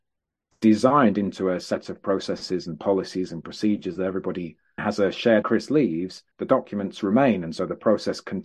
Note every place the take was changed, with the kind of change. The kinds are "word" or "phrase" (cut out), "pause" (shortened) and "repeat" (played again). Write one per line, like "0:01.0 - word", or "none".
0:04.8 - word
0:05.4 - phrase
0:06.3 - pause

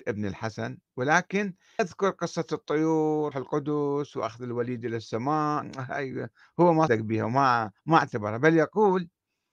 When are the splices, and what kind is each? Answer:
0:01.8 - word
0:03.3 - word
0:06.9 - word
0:07.8 - pause

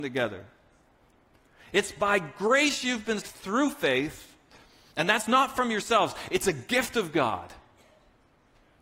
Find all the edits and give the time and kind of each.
0:03.2 - word

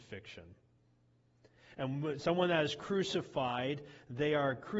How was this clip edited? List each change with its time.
none

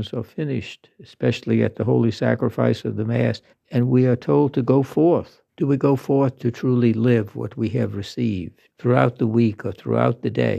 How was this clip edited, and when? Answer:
0:03.5 - pause
0:05.5 - pause
0:08.7 - pause

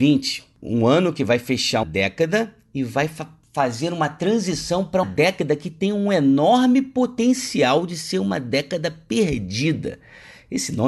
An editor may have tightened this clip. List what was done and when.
0:01.8 - word
0:05.0 - word

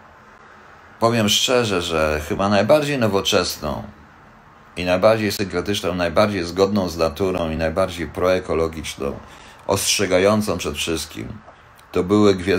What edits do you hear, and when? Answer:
none

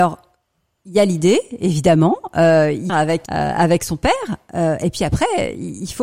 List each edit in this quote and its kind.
0:02.9 - phrase
0:03.3 - word

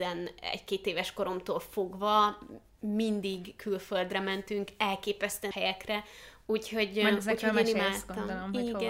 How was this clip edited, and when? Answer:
0:05.5 - word

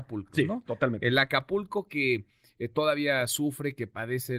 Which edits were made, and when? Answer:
none

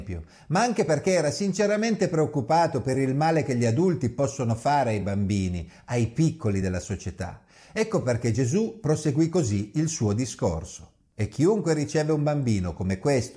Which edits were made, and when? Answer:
none

